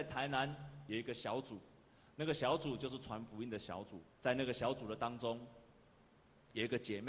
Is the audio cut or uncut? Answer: cut